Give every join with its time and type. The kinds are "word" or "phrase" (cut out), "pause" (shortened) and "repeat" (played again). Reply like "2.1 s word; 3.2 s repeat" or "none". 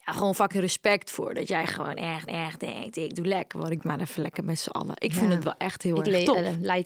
2.3 s repeat; 3.8 s phrase